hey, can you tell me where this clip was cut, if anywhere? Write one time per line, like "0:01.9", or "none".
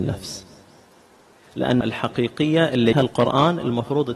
0:01.8
0:02.9